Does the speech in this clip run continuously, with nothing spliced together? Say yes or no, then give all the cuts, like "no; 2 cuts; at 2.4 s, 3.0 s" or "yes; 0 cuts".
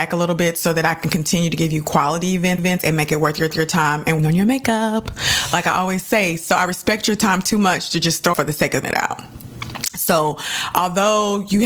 no; 5 cuts; at 2.6 s, 3.5 s, 4.2 s, 8.3 s, 8.8 s